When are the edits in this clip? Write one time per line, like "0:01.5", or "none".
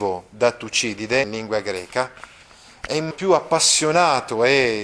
0:01.2
0:03.1